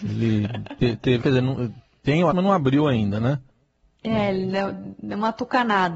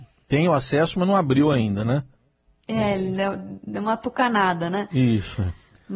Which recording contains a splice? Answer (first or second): first